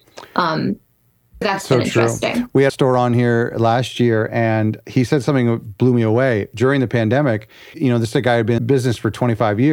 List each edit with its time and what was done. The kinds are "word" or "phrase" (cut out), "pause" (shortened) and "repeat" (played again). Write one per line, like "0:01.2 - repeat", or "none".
0:01.4 - word
0:02.7 - phrase
0:07.7 - word
0:08.6 - phrase